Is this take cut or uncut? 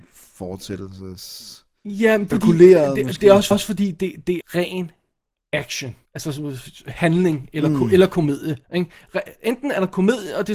cut